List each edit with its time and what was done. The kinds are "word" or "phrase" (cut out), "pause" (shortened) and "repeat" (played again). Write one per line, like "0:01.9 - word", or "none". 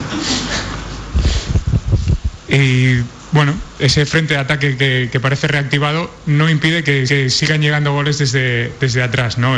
0:07.1 - repeat

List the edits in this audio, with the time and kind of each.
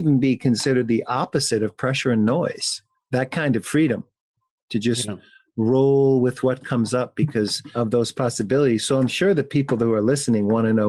none

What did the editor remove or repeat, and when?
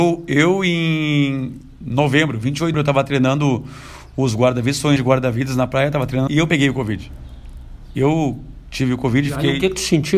0:02.7 - word
0:05.0 - word
0:06.3 - phrase

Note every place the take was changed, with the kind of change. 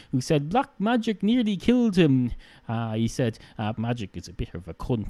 0:03.7 - word

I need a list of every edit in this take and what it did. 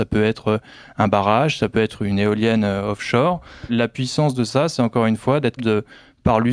0:03.7 - word
0:05.6 - word

